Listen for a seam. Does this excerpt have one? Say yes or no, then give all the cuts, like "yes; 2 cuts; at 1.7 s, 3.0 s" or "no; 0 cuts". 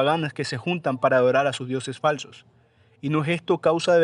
no; 0 cuts